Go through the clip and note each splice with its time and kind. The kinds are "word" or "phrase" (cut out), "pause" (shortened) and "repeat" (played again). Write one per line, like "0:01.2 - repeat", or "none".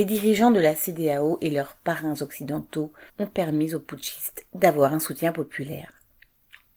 0:03.1 - pause